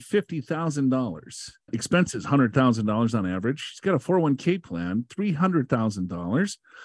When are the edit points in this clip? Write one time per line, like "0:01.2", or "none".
none